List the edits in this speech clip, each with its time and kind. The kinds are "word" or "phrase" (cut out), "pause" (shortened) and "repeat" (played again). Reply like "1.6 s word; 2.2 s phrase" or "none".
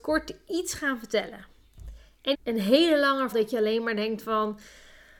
2.3 s word; 3.3 s word